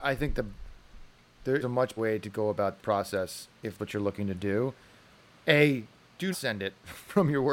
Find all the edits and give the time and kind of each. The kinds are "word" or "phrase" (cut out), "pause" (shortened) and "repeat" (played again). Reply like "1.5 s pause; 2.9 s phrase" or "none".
1.6 s word; 2.0 s word; 2.8 s word; 3.8 s word; 6.3 s word